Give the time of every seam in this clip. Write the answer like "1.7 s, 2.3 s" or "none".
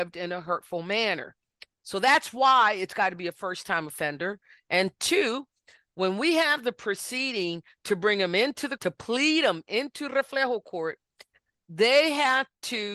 8.8 s